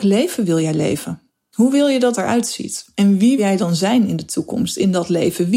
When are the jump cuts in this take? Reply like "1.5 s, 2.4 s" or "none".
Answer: 1.3 s, 2.1 s, 2.9 s, 3.4 s